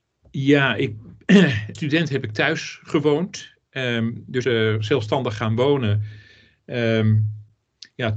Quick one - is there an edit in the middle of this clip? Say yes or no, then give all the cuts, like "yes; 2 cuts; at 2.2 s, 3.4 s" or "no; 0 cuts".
yes; 2 cuts; at 1.7 s, 4.4 s